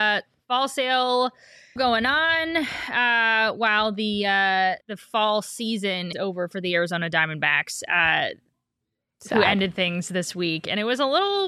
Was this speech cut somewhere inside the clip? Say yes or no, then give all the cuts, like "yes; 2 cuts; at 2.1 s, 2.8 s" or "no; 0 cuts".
yes; 3 cuts; at 1.8 s, 4.8 s, 6.1 s